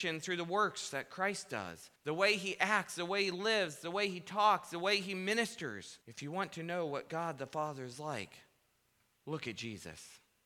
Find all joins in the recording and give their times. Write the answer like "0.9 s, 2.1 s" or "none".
2.0 s, 6.0 s